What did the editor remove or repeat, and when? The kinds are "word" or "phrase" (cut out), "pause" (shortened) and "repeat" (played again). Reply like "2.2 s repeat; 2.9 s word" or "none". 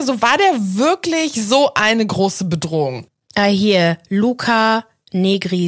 none